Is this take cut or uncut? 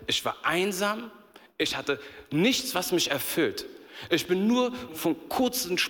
cut